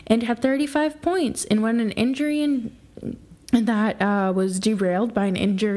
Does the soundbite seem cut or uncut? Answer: cut